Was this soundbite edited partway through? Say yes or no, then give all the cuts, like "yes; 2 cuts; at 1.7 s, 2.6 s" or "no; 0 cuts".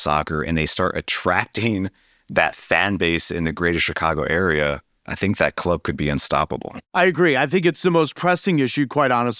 no; 0 cuts